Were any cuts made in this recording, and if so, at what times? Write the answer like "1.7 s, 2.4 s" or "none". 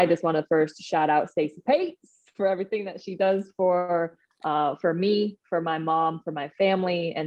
none